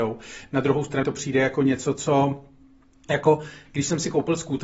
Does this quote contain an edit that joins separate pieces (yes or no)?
yes